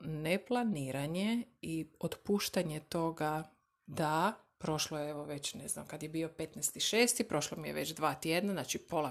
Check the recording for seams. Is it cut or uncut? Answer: uncut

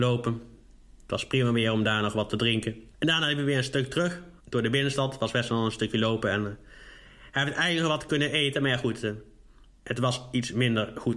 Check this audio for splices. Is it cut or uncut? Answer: cut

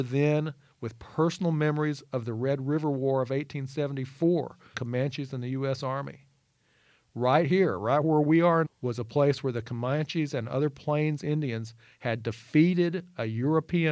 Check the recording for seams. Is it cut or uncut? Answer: cut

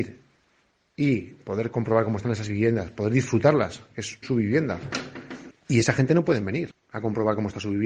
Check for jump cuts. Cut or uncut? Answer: cut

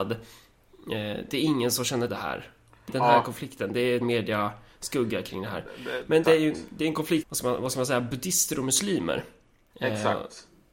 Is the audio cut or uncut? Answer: cut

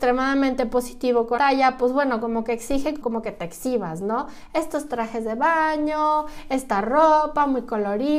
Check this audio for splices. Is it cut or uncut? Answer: cut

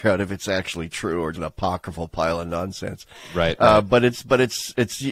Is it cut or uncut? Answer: cut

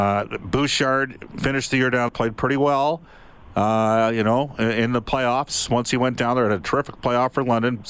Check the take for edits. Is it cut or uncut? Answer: cut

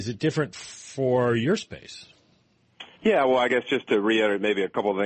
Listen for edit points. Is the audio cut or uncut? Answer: cut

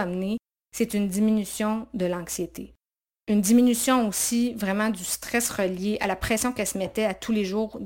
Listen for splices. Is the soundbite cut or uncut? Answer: uncut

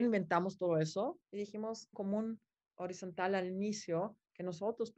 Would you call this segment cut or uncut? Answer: cut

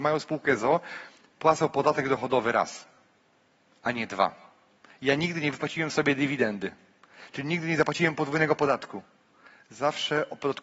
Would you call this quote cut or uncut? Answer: uncut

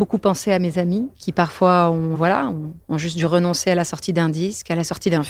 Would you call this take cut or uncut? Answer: cut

